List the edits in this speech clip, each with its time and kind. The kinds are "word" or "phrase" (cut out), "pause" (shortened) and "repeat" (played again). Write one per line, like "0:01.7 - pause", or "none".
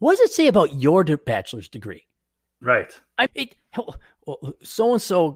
0:03.3 - word